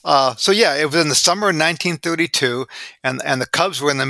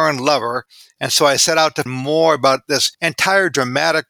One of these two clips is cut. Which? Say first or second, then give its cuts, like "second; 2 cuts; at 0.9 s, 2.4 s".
second; 2 cuts; at 1.9 s, 2.9 s